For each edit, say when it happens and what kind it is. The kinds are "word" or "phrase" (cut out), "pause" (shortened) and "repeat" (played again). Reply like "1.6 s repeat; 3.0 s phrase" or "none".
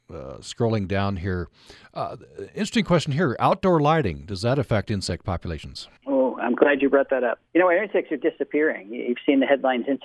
6.0 s pause; 7.5 s pause